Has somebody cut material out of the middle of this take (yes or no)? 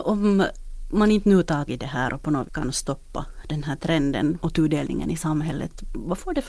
yes